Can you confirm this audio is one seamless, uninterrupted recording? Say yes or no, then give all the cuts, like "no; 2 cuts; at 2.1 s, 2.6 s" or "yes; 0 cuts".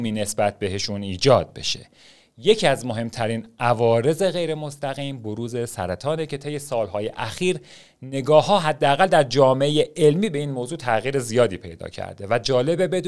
yes; 0 cuts